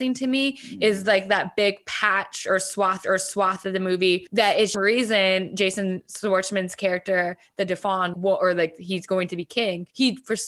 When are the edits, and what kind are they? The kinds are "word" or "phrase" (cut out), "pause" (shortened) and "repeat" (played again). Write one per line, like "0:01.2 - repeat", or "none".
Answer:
0:03.0 - repeat
0:04.7 - phrase
0:08.1 - word